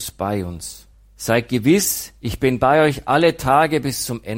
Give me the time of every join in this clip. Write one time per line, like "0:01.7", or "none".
0:00.9
0:02.2